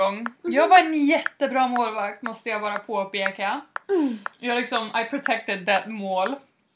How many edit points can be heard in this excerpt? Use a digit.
0